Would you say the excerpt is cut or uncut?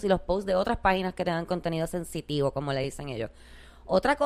uncut